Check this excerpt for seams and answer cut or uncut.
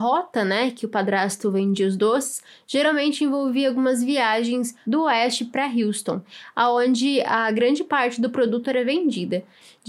uncut